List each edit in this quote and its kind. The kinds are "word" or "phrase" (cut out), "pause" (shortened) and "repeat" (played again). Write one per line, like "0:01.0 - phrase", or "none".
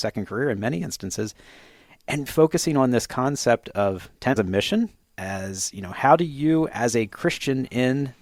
0:02.3 - word
0:04.4 - phrase